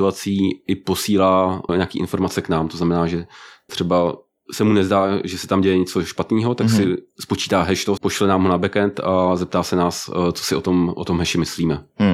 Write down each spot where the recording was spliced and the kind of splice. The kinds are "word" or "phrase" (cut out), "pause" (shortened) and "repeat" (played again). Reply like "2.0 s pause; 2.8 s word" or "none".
1.7 s word; 3.7 s word; 8.0 s phrase